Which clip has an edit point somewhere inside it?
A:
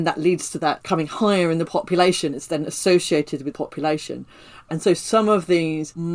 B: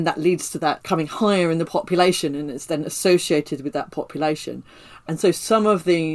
A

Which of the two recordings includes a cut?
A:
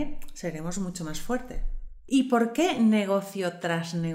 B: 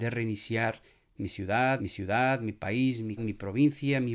B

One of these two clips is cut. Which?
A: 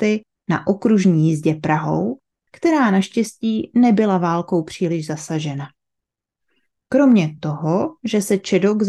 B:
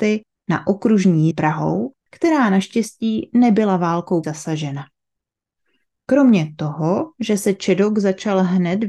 B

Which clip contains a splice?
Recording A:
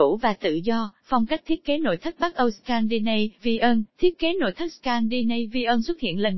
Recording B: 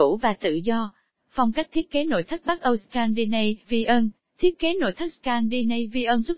A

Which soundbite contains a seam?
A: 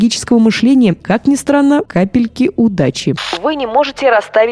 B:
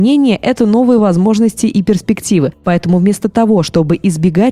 A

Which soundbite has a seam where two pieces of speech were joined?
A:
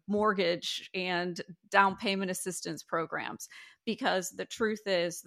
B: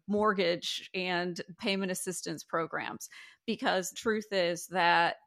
B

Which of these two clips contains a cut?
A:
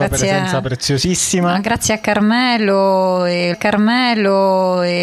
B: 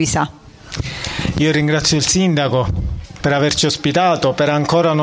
A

